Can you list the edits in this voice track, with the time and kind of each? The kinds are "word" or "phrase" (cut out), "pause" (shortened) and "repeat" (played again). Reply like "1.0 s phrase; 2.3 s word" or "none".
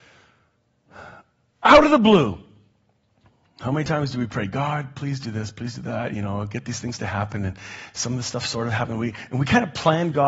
none